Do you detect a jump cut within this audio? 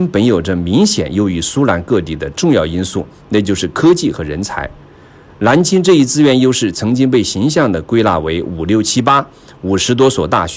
no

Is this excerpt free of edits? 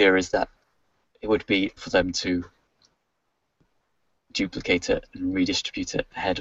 no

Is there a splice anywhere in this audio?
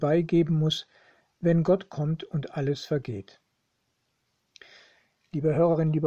no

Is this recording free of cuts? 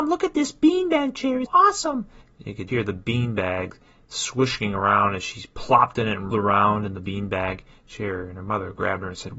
no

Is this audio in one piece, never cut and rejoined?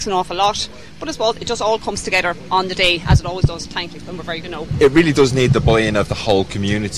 no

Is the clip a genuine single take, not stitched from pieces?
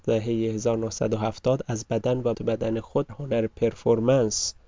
no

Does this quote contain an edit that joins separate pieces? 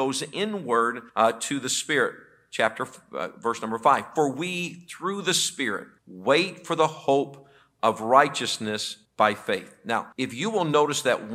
yes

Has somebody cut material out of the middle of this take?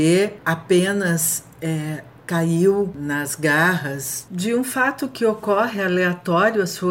yes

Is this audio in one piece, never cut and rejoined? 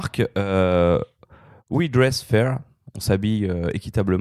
yes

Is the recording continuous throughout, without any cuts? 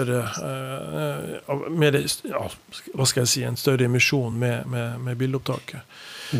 yes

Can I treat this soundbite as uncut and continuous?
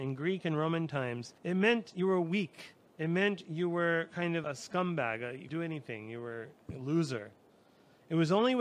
no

